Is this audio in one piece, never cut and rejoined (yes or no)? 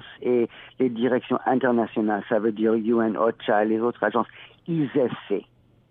yes